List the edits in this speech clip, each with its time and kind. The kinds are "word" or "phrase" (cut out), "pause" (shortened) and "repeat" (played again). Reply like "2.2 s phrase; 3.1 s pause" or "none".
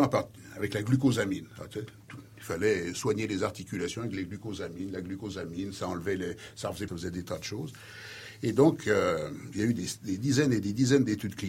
6.9 s phrase